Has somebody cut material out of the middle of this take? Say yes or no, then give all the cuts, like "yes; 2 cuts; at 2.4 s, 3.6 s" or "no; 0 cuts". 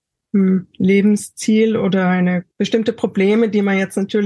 yes; 1 cut; at 2.5 s